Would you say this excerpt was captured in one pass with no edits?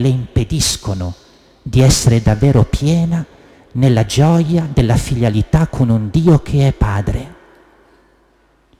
yes; 0 cuts

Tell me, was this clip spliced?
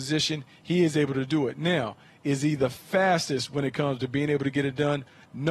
no; 0 cuts

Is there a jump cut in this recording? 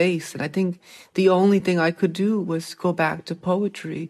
no; 0 cuts

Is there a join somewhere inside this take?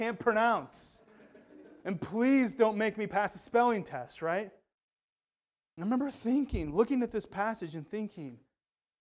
no; 0 cuts

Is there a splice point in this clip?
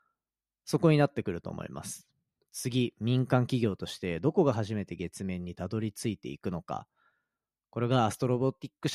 no; 0 cuts

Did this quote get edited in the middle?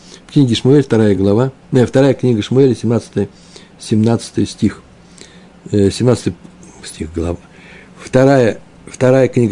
no; 0 cuts

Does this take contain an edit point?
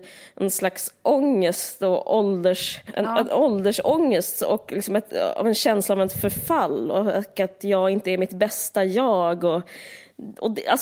no; 0 cuts

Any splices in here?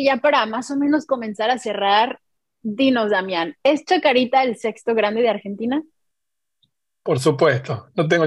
no; 0 cuts

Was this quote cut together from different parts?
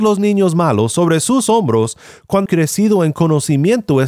yes; 1 cut; at 2.5 s

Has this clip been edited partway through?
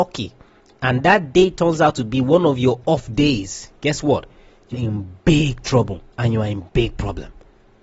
yes; 2 cuts; at 4.7 s, 6.1 s

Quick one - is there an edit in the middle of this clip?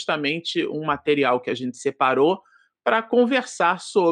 no; 0 cuts

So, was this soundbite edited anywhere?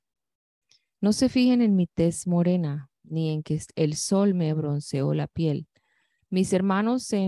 no; 0 cuts

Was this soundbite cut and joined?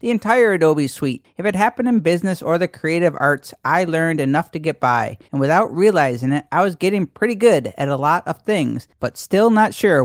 yes; 1 cut; at 5.2 s

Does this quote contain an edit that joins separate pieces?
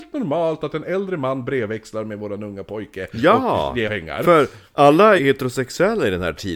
yes; 2 cuts; at 3.9 s, 5.2 s

